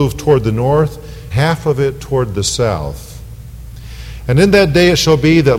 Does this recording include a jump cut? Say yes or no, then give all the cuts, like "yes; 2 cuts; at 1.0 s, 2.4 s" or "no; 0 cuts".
yes; 1 cut; at 1.3 s